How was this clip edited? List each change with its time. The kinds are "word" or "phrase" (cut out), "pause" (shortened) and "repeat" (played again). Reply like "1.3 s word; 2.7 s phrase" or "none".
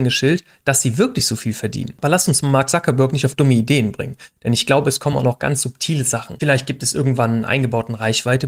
none